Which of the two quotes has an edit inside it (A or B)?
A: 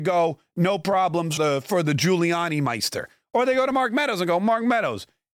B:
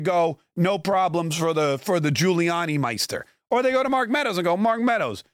A